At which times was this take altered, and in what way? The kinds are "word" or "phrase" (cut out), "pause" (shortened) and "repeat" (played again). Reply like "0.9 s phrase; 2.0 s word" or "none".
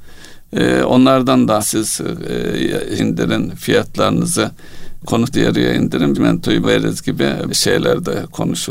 1.6 s word; 3.0 s word; 5.0 s word; 5.3 s word; 6.1 s word; 6.6 s word; 7.5 s word